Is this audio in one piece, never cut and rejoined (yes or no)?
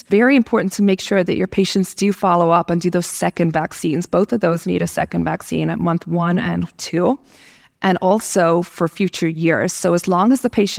yes